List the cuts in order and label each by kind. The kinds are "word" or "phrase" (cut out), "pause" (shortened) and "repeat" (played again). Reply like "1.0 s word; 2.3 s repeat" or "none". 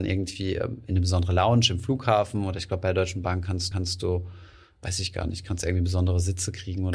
3.7 s repeat